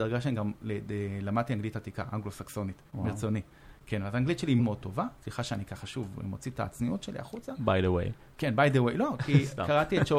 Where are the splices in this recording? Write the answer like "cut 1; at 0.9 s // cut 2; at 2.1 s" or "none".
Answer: cut 1; at 2.9 s // cut 2; at 4.6 s